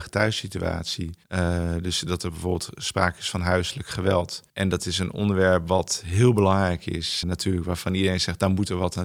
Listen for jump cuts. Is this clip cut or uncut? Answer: cut